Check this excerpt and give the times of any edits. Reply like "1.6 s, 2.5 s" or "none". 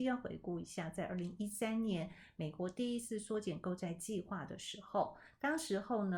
none

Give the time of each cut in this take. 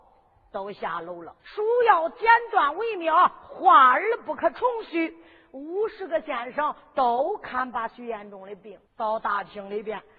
1.4 s, 8.9 s

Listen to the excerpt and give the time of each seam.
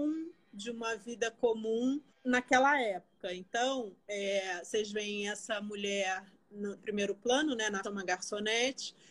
2.1 s, 6.8 s, 7.8 s

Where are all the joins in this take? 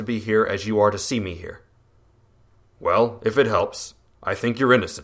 none

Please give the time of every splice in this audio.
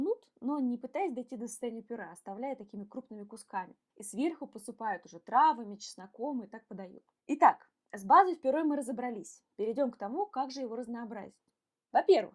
none

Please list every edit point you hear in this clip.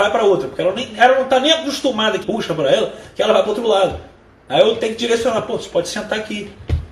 2.2 s

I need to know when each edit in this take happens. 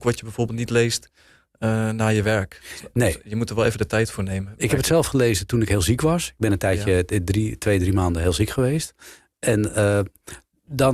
none

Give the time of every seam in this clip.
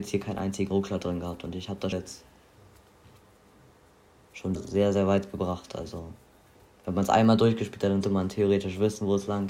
1.9 s, 4.6 s, 8.0 s

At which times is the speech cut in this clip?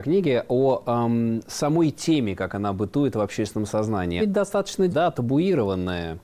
4.2 s, 4.9 s

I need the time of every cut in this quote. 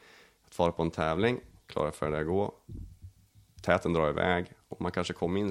none

